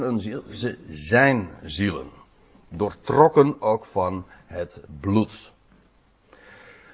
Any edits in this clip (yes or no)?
no